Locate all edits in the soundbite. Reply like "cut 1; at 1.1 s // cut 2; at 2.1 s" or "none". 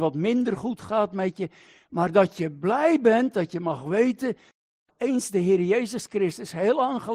none